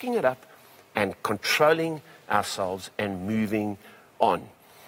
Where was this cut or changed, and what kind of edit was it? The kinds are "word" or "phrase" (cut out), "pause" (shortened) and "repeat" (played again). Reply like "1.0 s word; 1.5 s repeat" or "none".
none